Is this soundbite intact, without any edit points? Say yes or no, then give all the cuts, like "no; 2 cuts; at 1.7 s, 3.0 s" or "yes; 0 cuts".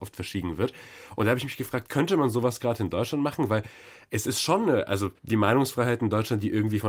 no; 1 cut; at 5.2 s